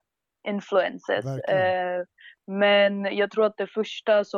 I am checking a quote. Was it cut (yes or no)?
no